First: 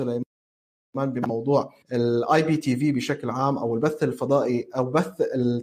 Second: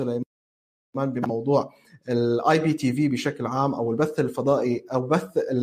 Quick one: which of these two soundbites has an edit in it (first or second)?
first